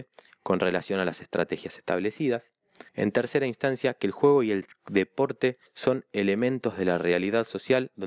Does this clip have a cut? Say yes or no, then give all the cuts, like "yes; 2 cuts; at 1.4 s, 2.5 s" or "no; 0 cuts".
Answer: yes; 2 cuts; at 2.9 s, 5.7 s